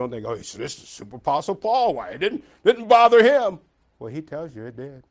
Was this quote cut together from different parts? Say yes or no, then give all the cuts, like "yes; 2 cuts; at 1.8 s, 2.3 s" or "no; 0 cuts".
no; 0 cuts